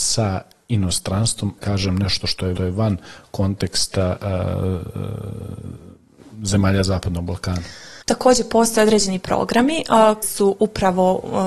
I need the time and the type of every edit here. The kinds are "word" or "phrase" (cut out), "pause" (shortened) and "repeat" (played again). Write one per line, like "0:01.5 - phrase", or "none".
0:01.6 - word
0:02.6 - repeat
0:08.0 - pause
0:10.2 - word